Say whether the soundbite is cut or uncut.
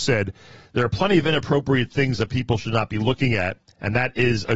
uncut